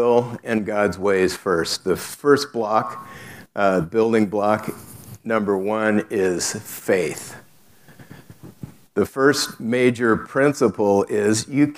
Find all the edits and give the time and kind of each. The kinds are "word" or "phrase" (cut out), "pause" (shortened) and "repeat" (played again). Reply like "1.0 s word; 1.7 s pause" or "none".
none